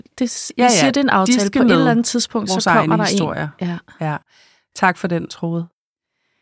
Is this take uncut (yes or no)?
yes